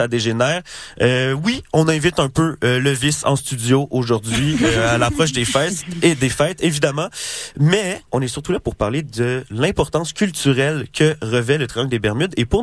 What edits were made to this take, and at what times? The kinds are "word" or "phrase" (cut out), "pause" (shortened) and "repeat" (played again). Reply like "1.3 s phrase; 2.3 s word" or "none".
8.1 s pause